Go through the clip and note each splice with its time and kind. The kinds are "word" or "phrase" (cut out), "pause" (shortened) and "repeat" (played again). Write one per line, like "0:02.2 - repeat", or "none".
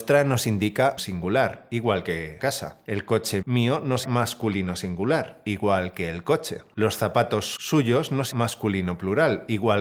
0:01.0 - word
0:02.4 - word
0:03.4 - word
0:04.0 - word
0:07.6 - word
0:08.3 - word